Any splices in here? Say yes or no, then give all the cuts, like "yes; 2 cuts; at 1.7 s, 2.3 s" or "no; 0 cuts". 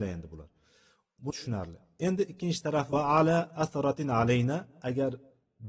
yes; 2 cuts; at 1.3 s, 2.9 s